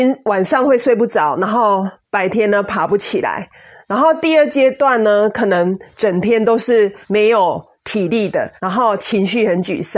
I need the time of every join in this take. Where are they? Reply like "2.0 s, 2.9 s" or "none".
7.0 s, 8.6 s